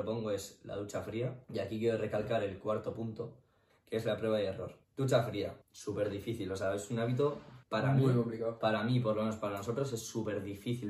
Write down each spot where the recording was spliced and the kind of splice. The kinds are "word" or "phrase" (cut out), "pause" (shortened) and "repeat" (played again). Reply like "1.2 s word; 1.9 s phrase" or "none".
1.4 s pause; 3.7 s pause; 4.8 s pause; 5.6 s pause; 7.6 s pause